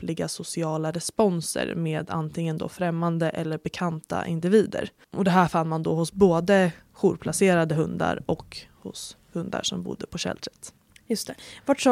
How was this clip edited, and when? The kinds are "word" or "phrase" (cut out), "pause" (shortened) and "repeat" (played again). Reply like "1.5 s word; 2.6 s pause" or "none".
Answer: none